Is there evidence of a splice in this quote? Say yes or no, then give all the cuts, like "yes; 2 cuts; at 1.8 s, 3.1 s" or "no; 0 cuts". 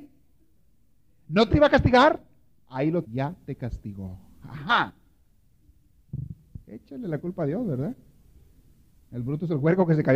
yes; 3 cuts; at 1.5 s, 3.1 s, 6.6 s